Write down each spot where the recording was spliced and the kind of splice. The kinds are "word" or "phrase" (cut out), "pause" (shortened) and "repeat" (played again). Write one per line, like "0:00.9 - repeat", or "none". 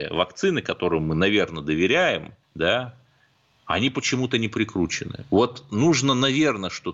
0:02.4 - pause